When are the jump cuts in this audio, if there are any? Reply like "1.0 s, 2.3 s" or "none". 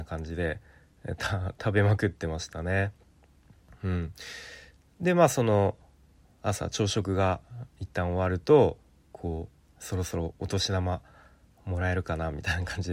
none